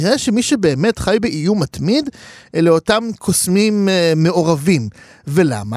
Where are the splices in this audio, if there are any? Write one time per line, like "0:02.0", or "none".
none